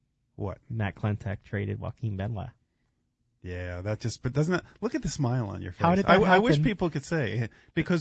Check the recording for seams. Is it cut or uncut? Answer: uncut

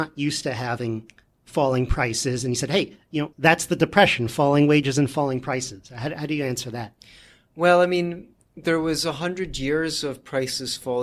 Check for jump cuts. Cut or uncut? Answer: cut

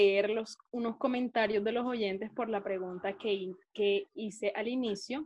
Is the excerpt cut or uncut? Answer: uncut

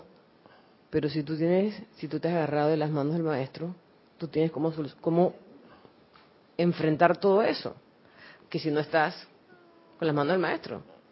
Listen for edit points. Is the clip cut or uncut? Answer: uncut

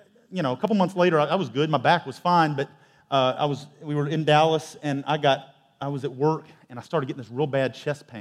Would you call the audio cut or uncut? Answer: uncut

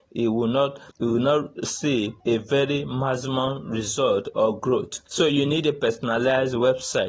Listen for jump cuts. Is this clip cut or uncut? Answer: cut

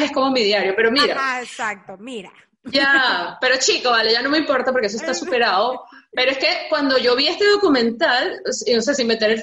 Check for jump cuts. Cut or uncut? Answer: uncut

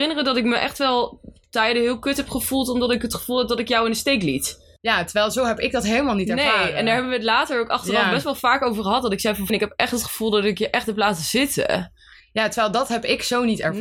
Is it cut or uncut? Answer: cut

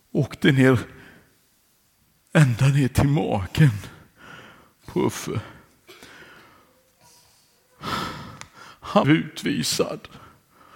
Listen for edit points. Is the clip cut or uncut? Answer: cut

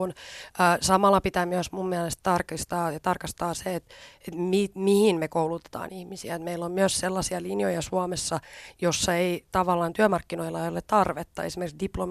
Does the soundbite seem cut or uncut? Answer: uncut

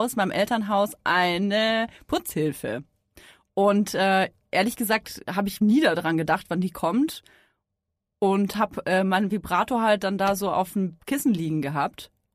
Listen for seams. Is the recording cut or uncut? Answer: uncut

